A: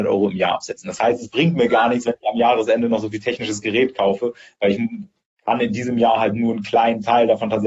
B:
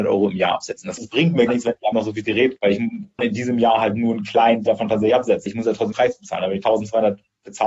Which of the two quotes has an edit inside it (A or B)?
B